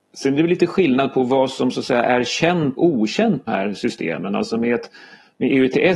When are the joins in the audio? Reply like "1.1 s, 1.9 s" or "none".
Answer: 2.8 s, 3.5 s